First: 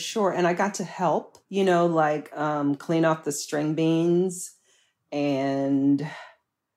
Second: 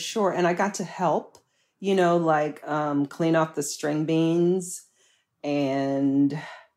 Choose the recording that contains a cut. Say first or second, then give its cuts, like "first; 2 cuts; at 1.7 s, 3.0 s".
first; 1 cut; at 1.4 s